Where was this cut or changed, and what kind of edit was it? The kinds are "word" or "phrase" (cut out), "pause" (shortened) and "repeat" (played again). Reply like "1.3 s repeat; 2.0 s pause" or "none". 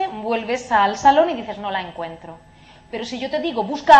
none

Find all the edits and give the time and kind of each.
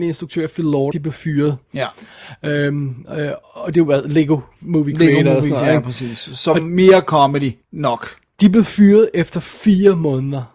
0.9 s phrase; 3.4 s pause; 7.6 s pause

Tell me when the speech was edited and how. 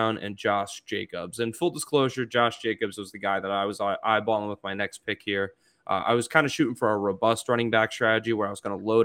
none

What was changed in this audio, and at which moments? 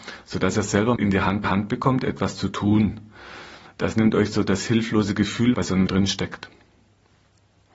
1.0 s word; 1.4 s repeat; 5.5 s phrase; 5.9 s phrase

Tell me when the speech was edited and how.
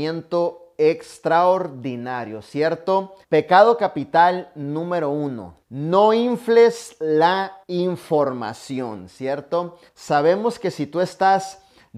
3.2 s pause; 5.6 s pause; 7.6 s pause; 9.9 s pause

